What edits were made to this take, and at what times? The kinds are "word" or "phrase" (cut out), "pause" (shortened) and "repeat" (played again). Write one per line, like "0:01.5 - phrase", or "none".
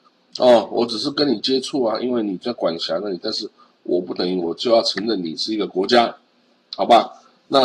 none